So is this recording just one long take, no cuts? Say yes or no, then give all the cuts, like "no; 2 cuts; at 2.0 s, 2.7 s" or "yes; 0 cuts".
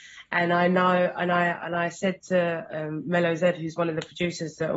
yes; 0 cuts